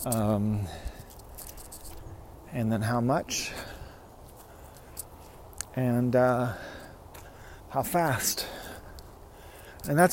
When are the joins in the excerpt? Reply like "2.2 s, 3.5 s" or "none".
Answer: 7.6 s